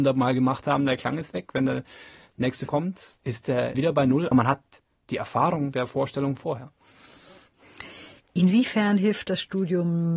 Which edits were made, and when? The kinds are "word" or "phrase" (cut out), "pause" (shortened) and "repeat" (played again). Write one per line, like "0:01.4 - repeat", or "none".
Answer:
0:02.7 - word
0:03.2 - pause
0:03.7 - phrase
0:04.3 - word